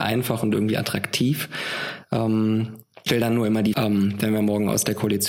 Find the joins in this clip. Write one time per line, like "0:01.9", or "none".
0:03.1
0:03.7